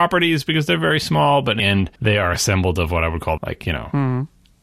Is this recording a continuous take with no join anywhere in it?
no; 3 cuts; at 1.6 s, 2.0 s, 3.4 s

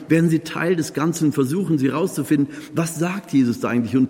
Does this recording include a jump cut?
no; 0 cuts

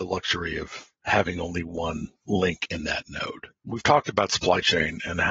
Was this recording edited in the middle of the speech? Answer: yes; 2 cuts; at 0.9 s, 3.6 s

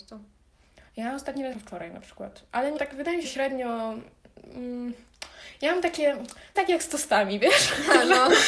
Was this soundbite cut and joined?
yes; 4 cuts; at 1.5 s, 2.8 s, 3.2 s, 6.5 s

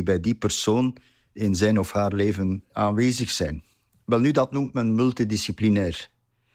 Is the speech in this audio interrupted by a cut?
no; 0 cuts

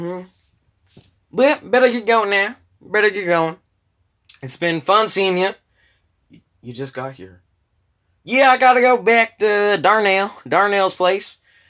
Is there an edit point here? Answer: no; 0 cuts

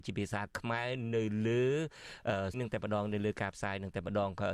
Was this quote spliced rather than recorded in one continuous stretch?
yes; 1 cut; at 2.5 s

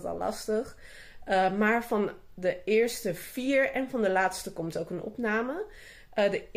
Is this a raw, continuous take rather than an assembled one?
yes; 0 cuts

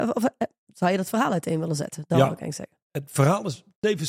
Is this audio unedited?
no; 1 cut; at 2.8 s

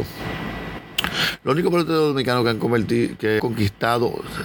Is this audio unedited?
no; 1 cut; at 3.4 s

